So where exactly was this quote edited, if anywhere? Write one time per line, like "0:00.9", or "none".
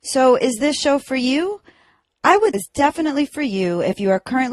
0:02.5